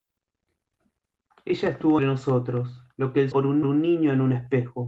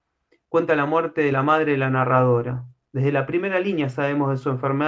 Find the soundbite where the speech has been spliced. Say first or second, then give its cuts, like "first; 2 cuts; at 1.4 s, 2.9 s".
first; 4 cuts; at 2.0 s, 2.9 s, 3.3 s, 3.6 s